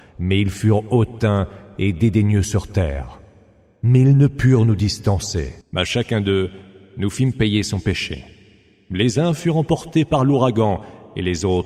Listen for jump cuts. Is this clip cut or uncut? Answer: uncut